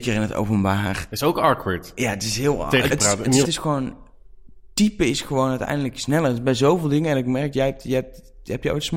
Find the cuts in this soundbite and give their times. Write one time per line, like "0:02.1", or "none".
0:02.9
0:03.4
0:07.5